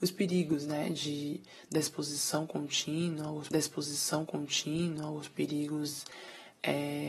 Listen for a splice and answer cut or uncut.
cut